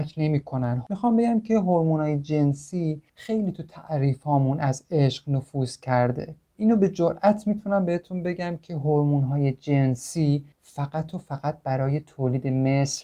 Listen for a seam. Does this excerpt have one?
yes; 2 cuts; at 3.1 s, 10.5 s

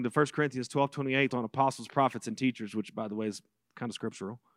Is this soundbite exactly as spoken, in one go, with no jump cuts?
no; 1 cut; at 1.3 s

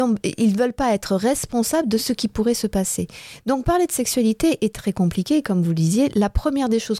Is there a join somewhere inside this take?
no; 0 cuts

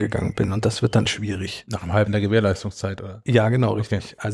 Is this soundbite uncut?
no; 2 cuts; at 1.0 s, 2.1 s

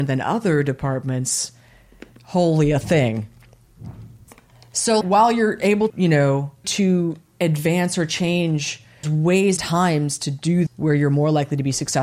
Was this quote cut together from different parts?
yes; 6 cuts; at 5.0 s, 5.9 s, 6.6 s, 9.0 s, 9.6 s, 10.7 s

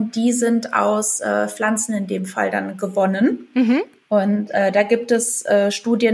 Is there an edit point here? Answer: no; 0 cuts

